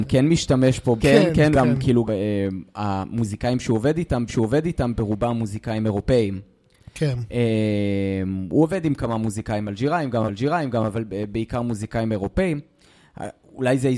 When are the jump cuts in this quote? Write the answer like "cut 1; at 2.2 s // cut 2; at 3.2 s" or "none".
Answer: cut 1; at 1.0 s // cut 2; at 1.5 s // cut 3; at 2.1 s // cut 4; at 4.3 s // cut 5; at 10.3 s